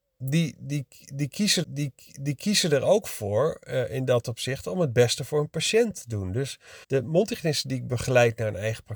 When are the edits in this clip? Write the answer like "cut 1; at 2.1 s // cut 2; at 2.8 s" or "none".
cut 1; at 1.6 s // cut 2; at 6.8 s